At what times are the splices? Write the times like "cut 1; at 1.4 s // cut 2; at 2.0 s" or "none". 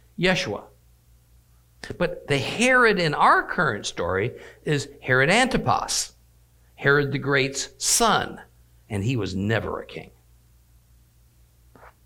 none